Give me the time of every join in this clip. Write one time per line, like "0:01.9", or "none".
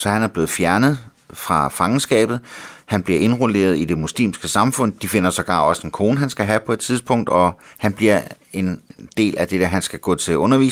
none